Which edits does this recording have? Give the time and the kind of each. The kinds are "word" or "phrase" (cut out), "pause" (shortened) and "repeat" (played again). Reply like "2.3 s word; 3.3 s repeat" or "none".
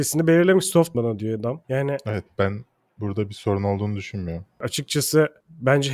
0.9 s word